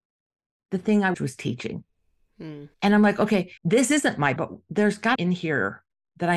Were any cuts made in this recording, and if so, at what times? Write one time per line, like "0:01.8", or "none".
0:01.1
0:02.7
0:03.6
0:04.4
0:05.2